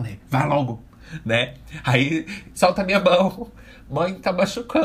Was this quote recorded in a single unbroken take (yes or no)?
no